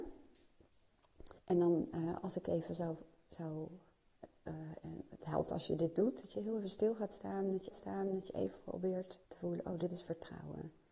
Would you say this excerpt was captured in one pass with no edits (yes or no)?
no